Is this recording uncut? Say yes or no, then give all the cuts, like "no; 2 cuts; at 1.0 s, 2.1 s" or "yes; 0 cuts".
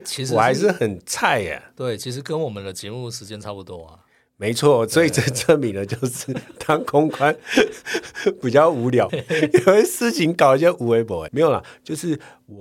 no; 2 cuts; at 9.1 s, 11.3 s